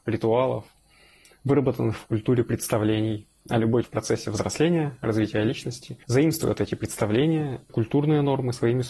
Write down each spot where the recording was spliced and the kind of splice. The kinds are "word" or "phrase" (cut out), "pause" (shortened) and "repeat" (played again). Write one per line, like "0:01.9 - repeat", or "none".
0:03.4 - pause
0:03.8 - word
0:06.0 - pause
0:07.7 - word